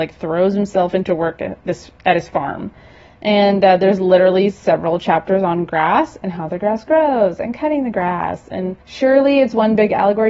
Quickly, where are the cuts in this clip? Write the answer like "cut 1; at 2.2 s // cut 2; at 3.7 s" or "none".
cut 1; at 8.8 s